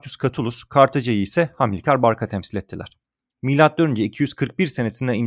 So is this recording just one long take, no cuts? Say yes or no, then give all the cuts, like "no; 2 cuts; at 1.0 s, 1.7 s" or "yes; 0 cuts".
yes; 0 cuts